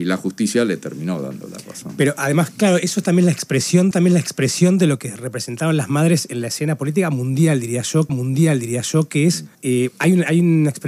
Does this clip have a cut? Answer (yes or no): yes